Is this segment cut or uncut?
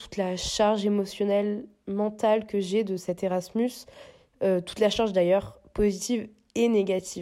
uncut